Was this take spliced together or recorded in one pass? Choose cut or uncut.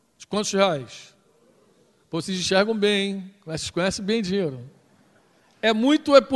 uncut